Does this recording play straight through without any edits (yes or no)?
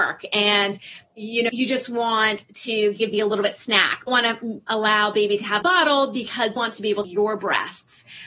no